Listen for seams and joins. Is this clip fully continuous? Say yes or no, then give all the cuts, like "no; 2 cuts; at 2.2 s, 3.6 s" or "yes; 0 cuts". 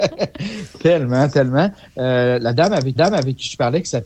no; 1 cut; at 3.0 s